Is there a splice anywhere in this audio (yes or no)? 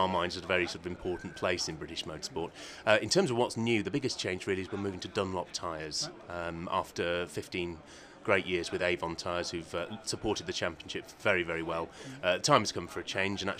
no